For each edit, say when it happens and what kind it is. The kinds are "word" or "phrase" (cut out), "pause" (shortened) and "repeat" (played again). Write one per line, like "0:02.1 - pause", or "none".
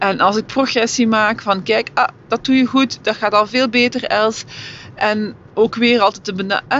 none